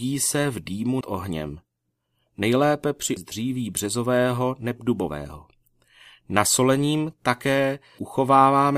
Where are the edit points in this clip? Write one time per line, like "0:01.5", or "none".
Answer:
0:01.0
0:03.2